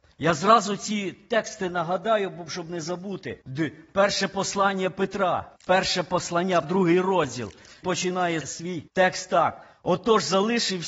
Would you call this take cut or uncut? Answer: cut